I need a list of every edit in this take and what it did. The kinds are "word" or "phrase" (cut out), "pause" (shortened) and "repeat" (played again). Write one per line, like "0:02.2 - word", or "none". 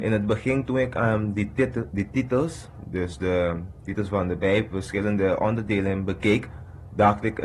none